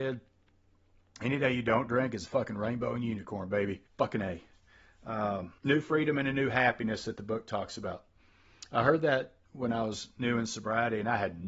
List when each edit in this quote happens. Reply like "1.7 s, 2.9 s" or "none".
3.9 s, 5.6 s